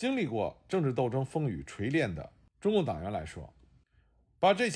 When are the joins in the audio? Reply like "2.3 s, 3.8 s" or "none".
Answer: none